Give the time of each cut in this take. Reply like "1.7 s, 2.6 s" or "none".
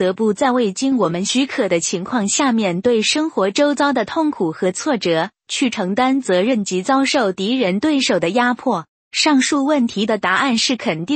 8.9 s